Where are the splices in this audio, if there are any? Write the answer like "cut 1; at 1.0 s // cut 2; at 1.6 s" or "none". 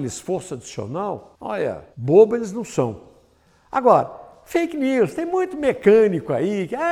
cut 1; at 1.9 s